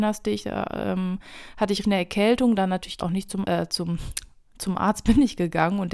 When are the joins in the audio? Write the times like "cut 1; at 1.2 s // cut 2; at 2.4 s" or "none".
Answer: cut 1; at 1.8 s // cut 2; at 3.0 s // cut 3; at 3.4 s